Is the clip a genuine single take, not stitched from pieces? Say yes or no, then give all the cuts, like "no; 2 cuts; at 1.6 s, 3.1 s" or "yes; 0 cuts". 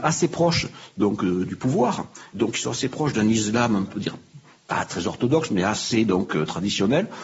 yes; 0 cuts